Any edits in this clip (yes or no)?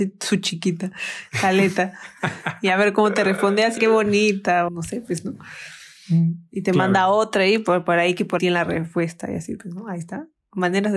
yes